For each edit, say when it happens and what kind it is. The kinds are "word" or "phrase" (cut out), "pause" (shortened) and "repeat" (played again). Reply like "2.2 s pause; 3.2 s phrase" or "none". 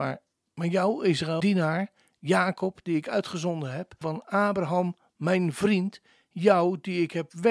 1.4 s word; 4.0 s word